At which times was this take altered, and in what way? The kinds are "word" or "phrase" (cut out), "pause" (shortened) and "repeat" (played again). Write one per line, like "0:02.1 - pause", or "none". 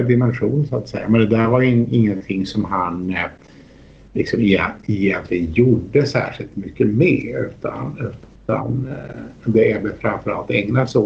none